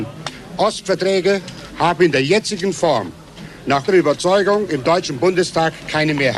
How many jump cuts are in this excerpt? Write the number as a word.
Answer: one